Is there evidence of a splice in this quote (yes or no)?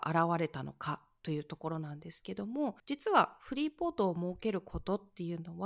yes